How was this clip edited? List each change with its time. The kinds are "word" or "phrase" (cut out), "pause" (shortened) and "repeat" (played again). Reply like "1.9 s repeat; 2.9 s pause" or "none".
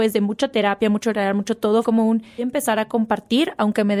1.8 s word; 2.4 s word